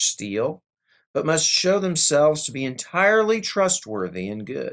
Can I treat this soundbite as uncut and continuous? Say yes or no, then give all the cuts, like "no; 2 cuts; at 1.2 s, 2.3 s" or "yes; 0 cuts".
yes; 0 cuts